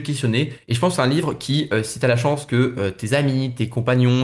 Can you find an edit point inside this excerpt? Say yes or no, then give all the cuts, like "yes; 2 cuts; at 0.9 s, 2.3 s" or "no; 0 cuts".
no; 0 cuts